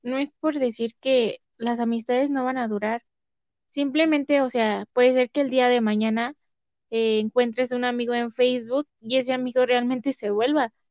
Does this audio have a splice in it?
no; 0 cuts

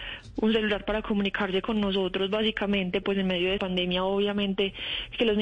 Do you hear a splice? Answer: yes; 2 cuts; at 3.0 s, 3.6 s

